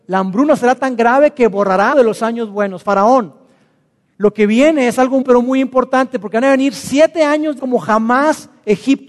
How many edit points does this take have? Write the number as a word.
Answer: three